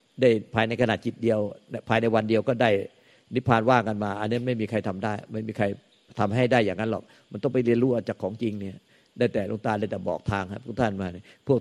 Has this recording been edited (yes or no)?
no